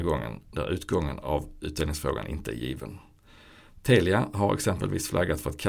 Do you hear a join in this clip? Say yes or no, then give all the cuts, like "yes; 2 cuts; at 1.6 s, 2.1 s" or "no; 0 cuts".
no; 0 cuts